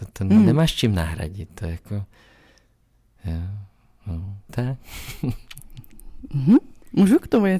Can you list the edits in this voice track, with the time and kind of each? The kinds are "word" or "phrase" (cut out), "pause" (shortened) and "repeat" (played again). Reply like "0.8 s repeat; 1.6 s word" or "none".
4.5 s word